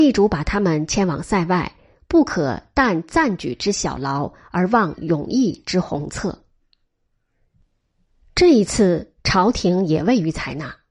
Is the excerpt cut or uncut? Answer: uncut